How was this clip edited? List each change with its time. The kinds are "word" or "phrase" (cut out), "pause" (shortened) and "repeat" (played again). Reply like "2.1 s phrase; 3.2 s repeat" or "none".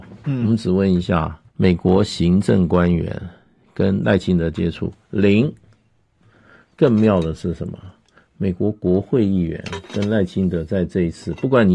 1.5 s pause

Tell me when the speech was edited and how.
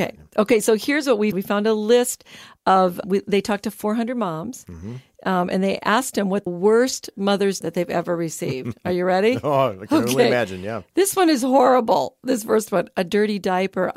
1.3 s word; 3.0 s word; 6.5 s word; 7.6 s phrase

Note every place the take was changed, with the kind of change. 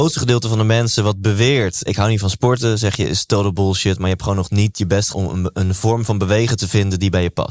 1.9 s word; 5.1 s word

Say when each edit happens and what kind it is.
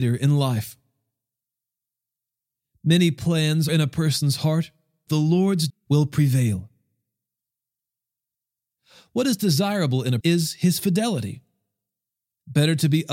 3.7 s word; 5.1 s word; 5.7 s word; 10.2 s word

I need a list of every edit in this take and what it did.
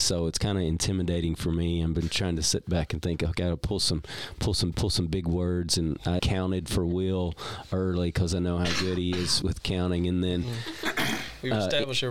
4.7 s repeat; 6.2 s word; 9.4 s word

